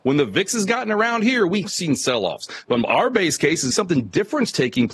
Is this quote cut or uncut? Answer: cut